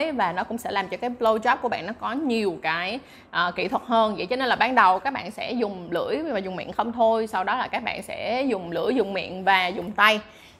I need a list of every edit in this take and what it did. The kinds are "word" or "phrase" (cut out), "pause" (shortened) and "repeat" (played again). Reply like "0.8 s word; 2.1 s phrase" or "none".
none